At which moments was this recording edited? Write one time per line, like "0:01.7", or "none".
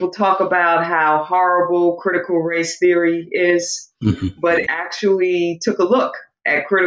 0:04.7